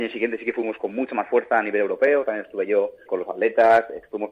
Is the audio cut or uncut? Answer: cut